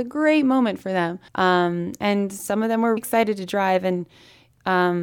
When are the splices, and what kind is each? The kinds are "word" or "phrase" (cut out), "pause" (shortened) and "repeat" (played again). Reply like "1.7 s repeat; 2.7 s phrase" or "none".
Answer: 1.3 s pause; 3.0 s word